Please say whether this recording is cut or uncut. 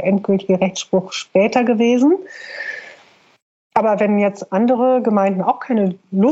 uncut